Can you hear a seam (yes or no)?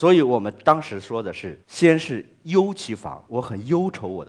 yes